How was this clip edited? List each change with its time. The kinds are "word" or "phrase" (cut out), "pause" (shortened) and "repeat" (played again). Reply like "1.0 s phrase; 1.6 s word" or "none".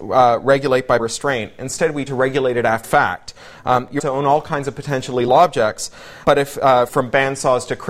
1.0 s word; 2.1 s word; 2.8 s word; 4.0 s word; 5.3 s word; 6.2 s word; 6.9 s word